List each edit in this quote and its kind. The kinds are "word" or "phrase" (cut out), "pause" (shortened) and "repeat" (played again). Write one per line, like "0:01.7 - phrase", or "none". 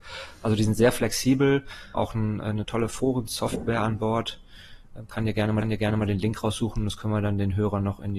0:01.9 - word
0:05.6 - repeat